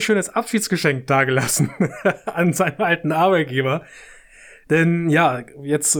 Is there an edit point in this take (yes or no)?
no